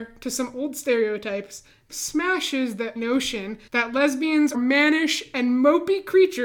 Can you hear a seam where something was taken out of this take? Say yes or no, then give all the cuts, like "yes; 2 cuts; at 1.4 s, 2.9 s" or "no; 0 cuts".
yes; 4 cuts; at 1.9 s, 3.0 s, 3.7 s, 4.5 s